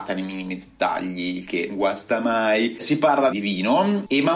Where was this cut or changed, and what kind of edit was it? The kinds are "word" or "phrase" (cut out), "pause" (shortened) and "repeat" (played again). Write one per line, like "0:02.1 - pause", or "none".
0:01.7 - word
0:03.3 - word